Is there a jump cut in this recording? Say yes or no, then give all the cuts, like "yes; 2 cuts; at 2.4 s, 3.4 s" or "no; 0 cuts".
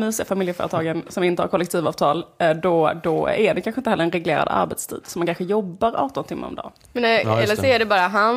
no; 0 cuts